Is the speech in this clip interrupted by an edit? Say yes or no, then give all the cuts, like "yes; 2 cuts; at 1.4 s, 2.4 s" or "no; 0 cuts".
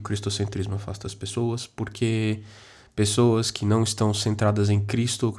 no; 0 cuts